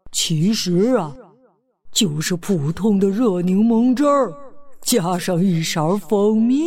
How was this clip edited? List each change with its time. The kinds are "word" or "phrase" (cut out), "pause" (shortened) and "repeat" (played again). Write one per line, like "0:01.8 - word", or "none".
none